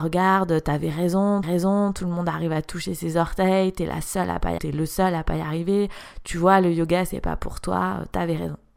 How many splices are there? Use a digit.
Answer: 2